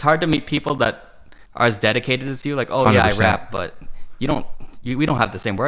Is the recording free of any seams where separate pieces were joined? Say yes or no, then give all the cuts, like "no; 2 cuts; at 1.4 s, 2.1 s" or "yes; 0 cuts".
no; 1 cut; at 1.5 s